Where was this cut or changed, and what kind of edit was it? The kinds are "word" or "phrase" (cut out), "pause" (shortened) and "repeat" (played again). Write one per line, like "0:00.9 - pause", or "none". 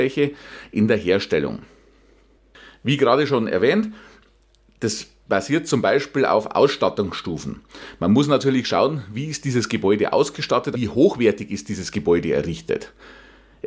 0:10.7 - word